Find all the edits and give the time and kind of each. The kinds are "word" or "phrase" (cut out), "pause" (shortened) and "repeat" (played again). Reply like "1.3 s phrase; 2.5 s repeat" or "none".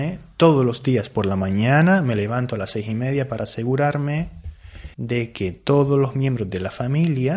4.9 s pause